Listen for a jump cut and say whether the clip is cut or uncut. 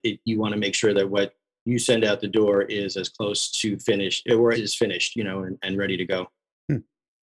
cut